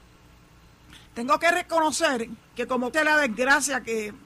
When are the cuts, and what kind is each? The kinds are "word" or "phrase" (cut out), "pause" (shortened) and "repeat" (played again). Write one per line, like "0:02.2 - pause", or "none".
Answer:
0:01.1 - pause
0:02.5 - pause
0:02.9 - word